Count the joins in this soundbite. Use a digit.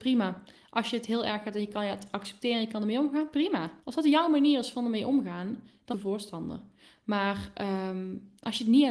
2